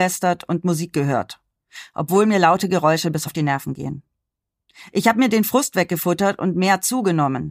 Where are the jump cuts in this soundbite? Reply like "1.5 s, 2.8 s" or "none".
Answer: 3.3 s